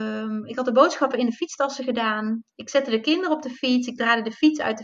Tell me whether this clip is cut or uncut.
uncut